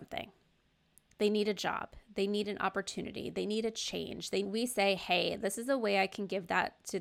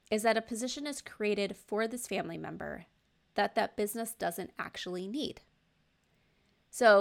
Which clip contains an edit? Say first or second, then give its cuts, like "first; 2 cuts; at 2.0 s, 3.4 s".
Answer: first; 1 cut; at 4.4 s